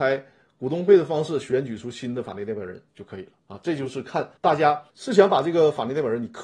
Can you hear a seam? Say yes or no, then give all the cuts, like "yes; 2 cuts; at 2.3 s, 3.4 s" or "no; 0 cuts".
yes; 4 cuts; at 2.9 s, 3.4 s, 4.4 s, 4.9 s